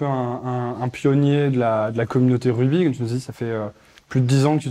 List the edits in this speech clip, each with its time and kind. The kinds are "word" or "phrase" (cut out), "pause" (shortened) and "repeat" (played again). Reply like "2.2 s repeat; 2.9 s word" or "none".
none